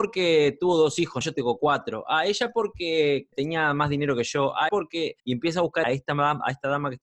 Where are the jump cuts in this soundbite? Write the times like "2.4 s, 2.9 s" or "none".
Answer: 1.2 s, 3.3 s, 4.7 s, 5.2 s, 5.8 s